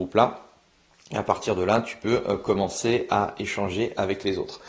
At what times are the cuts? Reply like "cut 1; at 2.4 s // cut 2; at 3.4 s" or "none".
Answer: none